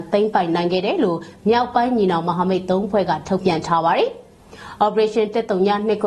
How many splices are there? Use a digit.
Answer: 0